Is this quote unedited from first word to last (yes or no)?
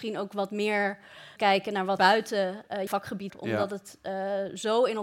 no